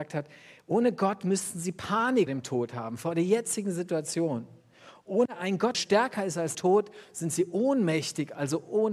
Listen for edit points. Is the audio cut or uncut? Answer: cut